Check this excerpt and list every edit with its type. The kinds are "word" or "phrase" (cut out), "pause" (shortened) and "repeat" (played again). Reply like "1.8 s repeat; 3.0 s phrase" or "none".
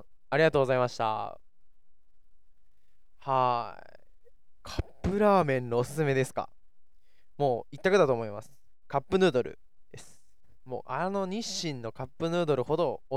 4.6 s phrase